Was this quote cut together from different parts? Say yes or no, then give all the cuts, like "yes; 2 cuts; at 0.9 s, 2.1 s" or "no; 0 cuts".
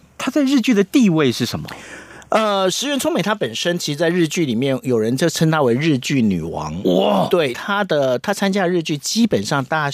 yes; 1 cut; at 7.5 s